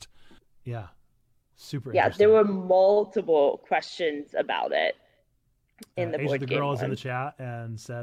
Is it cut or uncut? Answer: uncut